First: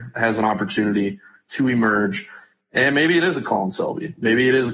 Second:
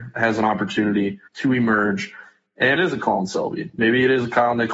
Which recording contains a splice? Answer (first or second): second